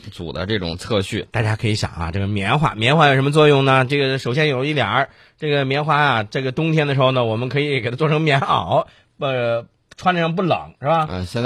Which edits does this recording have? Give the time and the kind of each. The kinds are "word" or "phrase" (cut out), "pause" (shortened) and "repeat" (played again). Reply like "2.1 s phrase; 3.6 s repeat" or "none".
none